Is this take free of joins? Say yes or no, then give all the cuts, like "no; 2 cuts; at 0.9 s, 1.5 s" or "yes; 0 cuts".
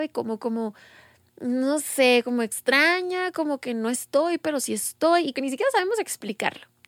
no; 1 cut; at 5.3 s